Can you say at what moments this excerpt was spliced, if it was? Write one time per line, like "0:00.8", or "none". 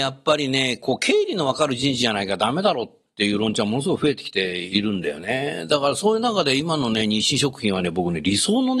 none